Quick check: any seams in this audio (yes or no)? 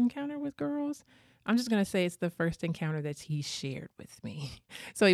no